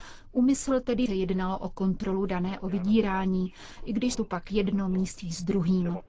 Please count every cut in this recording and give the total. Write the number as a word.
three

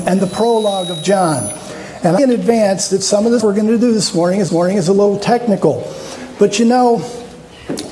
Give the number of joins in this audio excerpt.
three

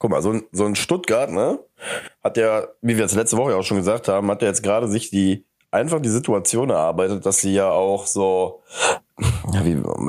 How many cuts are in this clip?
zero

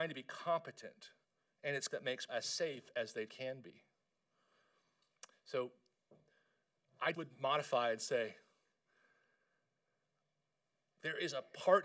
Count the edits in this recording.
five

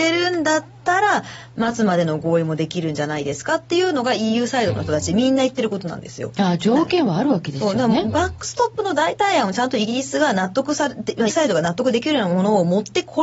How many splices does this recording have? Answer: one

